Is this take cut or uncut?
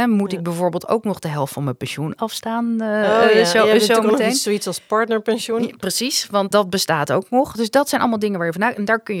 cut